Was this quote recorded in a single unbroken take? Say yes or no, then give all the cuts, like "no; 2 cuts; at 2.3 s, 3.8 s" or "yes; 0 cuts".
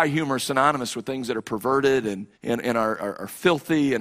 no; 1 cut; at 2.3 s